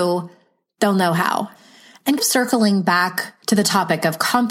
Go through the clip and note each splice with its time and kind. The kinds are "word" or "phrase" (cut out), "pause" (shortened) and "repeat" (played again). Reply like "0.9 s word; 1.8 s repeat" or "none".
2.2 s word; 3.4 s pause

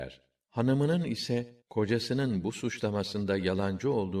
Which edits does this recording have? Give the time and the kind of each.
1.6 s pause

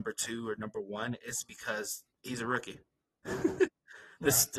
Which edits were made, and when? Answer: 2.1 s pause; 2.8 s pause

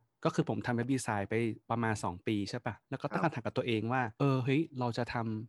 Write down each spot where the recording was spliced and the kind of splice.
1.6 s pause; 2.8 s pause; 4.1 s pause

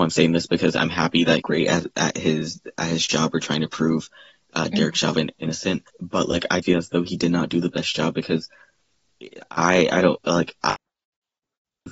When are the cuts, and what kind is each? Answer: 1.4 s phrase; 5.9 s pause; 6.6 s word

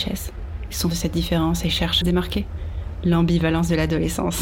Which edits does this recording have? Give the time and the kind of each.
0.9 s word; 2.0 s phrase

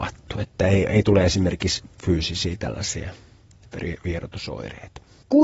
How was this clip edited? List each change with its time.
none

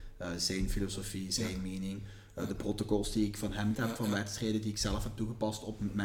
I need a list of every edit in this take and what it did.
3.7 s word

